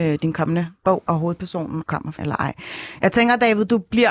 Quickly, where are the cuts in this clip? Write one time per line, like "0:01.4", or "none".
0:01.8
0:02.2